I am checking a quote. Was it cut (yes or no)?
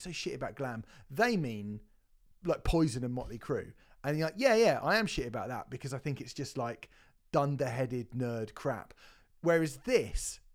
no